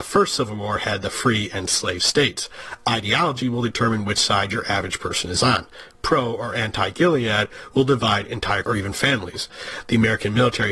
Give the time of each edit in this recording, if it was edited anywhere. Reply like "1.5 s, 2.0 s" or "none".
8.6 s

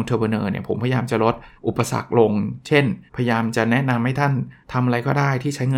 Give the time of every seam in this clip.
1.5 s, 3.1 s, 4.6 s

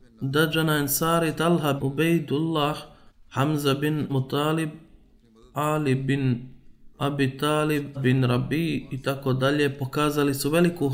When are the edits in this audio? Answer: 1.8 s, 3.1 s, 4.1 s, 6.9 s, 7.9 s

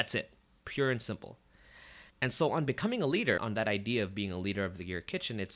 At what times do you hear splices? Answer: 2.1 s, 3.4 s

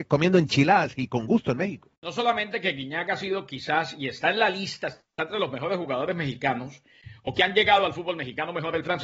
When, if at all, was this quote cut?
1.9 s

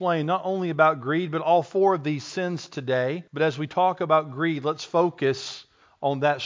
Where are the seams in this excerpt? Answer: 3.3 s

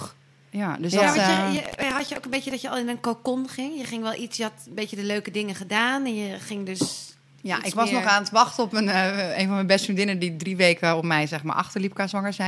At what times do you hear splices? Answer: none

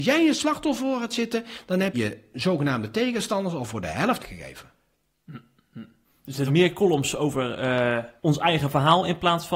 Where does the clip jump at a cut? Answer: 1.9 s, 4.2 s, 6.0 s, 6.5 s, 8.2 s

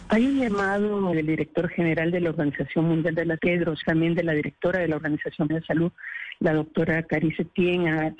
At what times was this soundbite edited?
1.1 s, 3.4 s, 3.8 s, 5.5 s

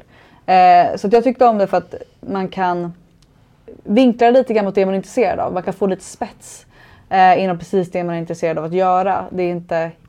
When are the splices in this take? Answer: none

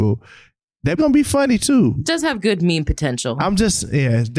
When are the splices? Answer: 1.0 s, 2.0 s

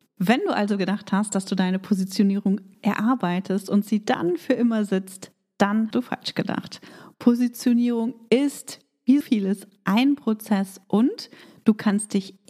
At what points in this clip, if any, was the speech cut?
2.7 s, 5.9 s, 9.2 s

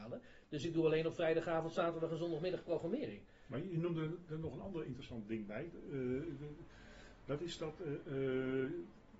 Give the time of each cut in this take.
none

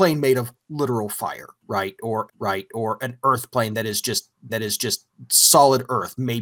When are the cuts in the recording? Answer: 2.3 s, 4.5 s

